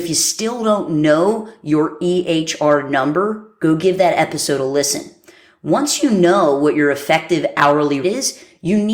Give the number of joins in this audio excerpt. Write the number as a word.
one